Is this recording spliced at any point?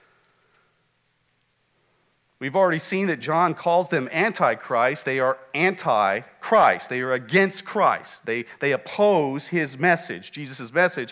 no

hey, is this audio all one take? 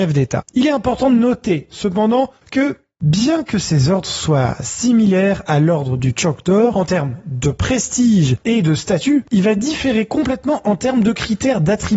no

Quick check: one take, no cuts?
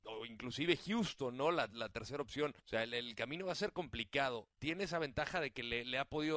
no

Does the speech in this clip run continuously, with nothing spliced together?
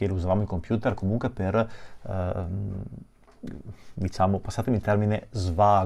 yes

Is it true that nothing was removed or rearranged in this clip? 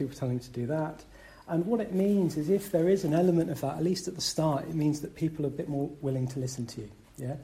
yes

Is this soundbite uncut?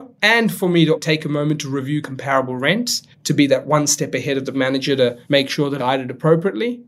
no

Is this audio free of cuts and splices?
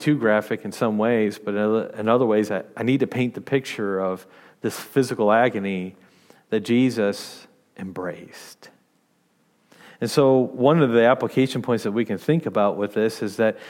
yes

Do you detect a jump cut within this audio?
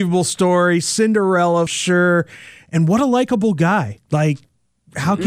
yes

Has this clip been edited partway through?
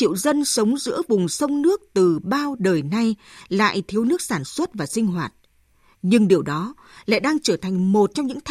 no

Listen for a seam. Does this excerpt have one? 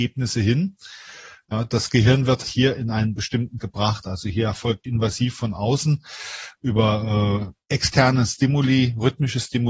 yes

